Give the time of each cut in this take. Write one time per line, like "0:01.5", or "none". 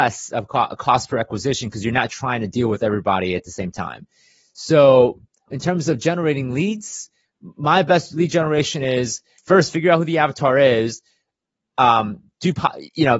0:05.5
0:09.4

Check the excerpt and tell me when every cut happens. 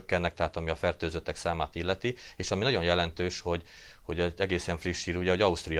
none

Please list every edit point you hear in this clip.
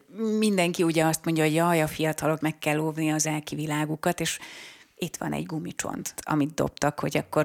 0:02.4
0:03.2
0:06.2

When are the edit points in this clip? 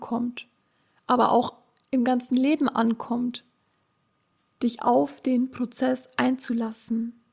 none

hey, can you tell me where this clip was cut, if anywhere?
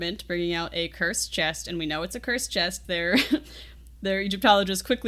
0:02.8

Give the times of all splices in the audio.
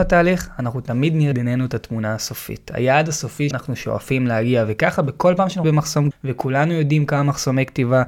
0:01.3
0:03.5
0:05.6
0:06.1

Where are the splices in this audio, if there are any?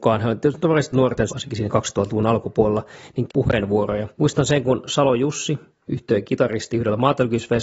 0:00.9
0:01.3
0:03.3
0:04.1

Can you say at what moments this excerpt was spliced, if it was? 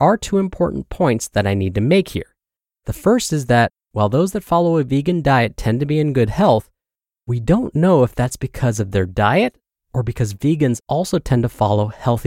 none

